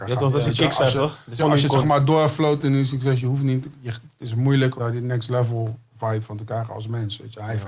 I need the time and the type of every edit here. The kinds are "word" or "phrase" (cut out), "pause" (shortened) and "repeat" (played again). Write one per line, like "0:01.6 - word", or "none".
0:01.4 - word
0:04.8 - phrase
0:05.9 - pause